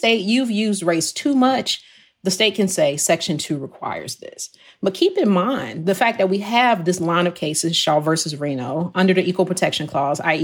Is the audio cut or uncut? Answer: uncut